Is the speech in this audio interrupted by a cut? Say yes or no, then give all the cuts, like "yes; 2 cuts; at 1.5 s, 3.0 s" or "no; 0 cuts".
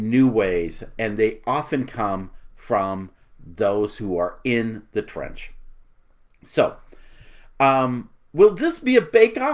no; 0 cuts